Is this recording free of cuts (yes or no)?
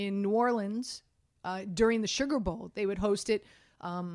yes